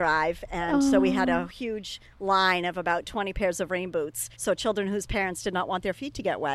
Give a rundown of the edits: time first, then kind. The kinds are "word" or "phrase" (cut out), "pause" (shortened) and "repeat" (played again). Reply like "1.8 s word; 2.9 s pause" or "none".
4.3 s pause